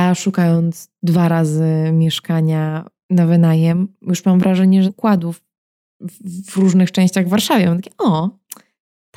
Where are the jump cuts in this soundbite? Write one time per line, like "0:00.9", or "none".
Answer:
0:04.9